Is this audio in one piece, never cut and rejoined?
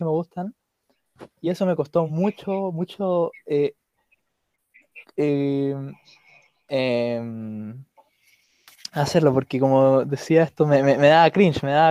yes; 0 cuts

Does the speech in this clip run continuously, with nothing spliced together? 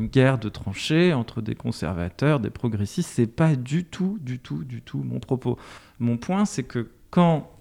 yes; 0 cuts

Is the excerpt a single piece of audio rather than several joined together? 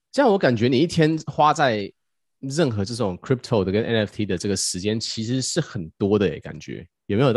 yes; 0 cuts

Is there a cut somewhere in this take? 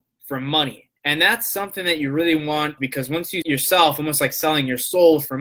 yes; 3 cuts; at 1.0 s, 2.8 s, 3.4 s

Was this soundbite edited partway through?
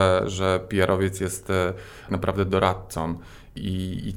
yes; 1 cut; at 2.1 s

